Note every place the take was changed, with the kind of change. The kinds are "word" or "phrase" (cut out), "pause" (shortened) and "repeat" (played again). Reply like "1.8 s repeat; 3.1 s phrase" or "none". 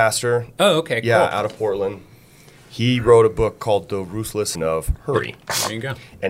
4.5 s word